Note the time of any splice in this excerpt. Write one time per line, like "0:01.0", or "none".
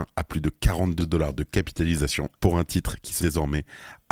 0:01.0
0:02.4
0:03.2